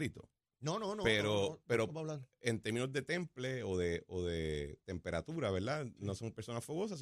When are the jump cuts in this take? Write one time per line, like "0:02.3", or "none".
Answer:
none